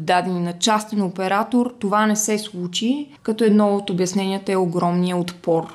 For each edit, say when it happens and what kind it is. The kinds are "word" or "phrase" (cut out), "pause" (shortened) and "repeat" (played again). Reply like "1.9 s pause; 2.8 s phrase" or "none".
3.2 s pause